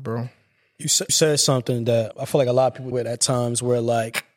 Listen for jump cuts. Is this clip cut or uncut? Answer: cut